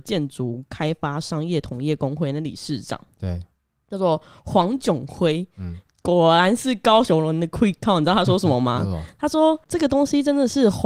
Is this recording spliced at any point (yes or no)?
no